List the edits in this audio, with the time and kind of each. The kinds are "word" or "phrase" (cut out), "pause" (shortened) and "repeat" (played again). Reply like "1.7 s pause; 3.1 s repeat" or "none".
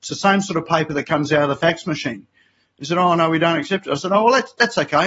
none

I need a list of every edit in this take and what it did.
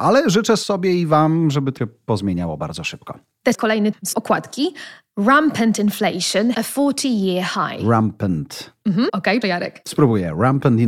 1.8 s word; 3.5 s word; 3.9 s word; 6.5 s word; 9.1 s word; 9.4 s word

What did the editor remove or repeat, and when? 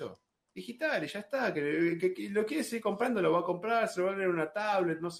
none

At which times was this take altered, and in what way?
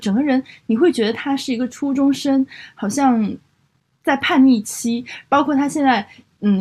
none

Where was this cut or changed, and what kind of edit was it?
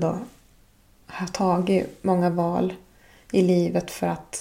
none

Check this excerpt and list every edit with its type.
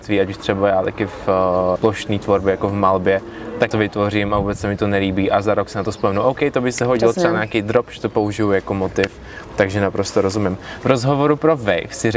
1.8 s word; 3.7 s word

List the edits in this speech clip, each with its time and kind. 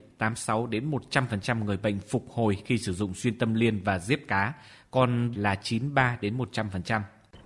5.3 s phrase

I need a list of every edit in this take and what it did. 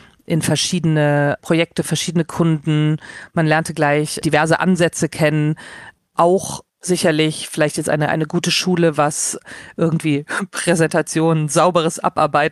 6.7 s pause

